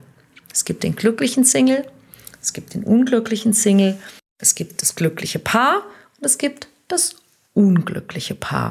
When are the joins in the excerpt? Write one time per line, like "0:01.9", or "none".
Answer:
none